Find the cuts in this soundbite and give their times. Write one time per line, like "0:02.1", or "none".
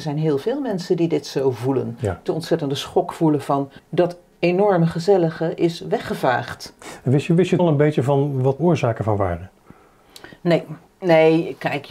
0:02.3
0:03.8
0:07.6
0:08.6
0:10.9